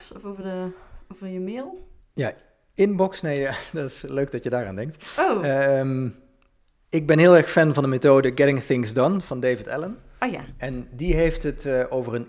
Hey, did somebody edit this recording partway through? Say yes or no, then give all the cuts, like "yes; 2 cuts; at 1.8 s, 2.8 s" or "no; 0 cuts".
no; 0 cuts